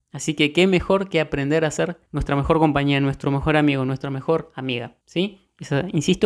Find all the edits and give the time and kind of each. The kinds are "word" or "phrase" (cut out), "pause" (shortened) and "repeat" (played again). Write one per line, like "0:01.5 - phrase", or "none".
0:02.1 - pause
0:05.0 - pause